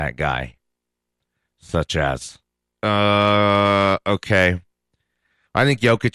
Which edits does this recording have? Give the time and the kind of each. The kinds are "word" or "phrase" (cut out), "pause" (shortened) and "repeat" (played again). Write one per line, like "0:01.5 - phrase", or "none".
none